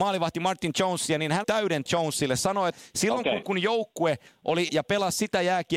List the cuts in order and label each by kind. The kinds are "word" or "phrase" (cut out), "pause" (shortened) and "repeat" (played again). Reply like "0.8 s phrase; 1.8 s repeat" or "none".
1.4 s word; 1.9 s word; 2.7 s word; 3.4 s word; 4.7 s word